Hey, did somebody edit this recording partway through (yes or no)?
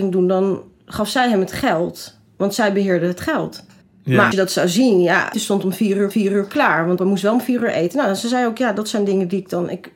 yes